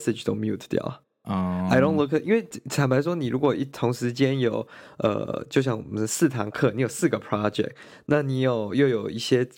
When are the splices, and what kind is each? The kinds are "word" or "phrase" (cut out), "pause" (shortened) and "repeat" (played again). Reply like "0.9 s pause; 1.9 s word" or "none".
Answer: none